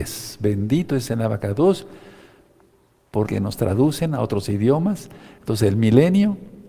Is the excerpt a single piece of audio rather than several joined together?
no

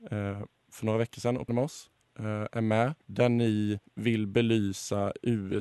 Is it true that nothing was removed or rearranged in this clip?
no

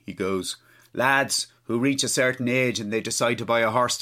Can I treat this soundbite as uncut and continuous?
yes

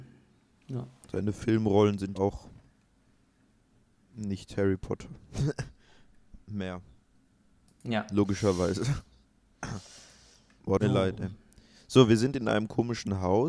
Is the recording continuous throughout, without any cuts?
no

